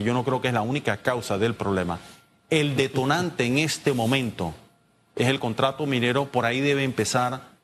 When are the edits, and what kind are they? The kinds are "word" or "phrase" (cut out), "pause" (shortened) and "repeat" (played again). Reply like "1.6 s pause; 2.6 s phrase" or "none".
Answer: none